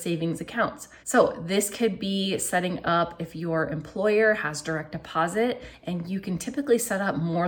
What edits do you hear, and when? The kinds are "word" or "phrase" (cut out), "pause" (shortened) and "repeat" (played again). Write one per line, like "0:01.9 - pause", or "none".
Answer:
0:01.0 - pause

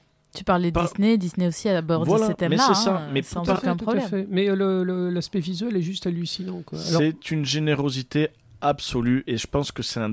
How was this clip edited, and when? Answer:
none

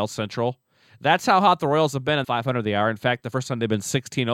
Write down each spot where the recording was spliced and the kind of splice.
0:02.2 - phrase

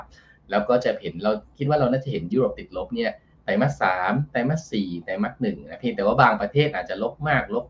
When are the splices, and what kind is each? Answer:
0:02.3 - word

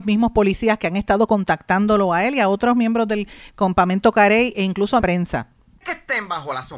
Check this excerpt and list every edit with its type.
0:05.0 - phrase

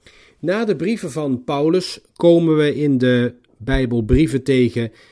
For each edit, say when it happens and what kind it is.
none

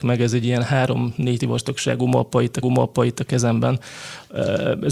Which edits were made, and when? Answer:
0:01.4 - word
0:02.6 - repeat

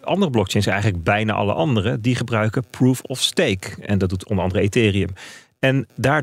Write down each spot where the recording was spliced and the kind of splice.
none

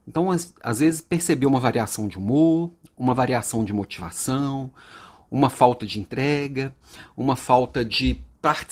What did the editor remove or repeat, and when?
none

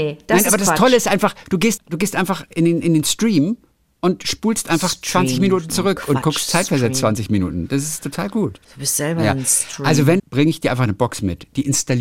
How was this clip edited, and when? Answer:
0:01.8 - word
0:08.6 - pause
0:10.2 - phrase

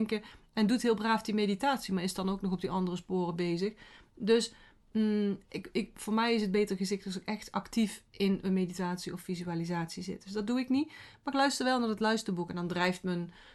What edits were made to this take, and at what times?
none

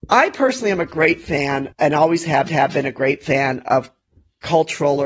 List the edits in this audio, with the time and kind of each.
0:01.7 - pause
0:02.5 - repeat
0:04.1 - pause

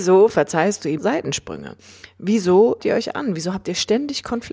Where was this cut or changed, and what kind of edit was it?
0:01.0 - word
0:02.8 - word

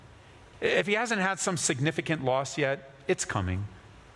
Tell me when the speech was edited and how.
none

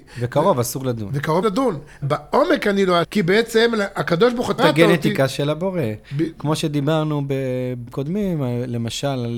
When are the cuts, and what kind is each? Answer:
0:01.4 - word
0:02.0 - word
0:03.0 - word
0:04.6 - word
0:07.9 - word

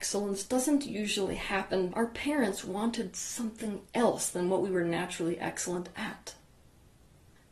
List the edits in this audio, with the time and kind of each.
0:01.9 - word

